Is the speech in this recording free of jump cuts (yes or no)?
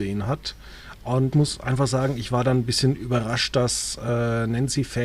no